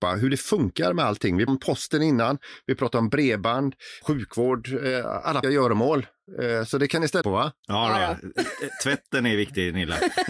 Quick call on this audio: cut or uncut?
cut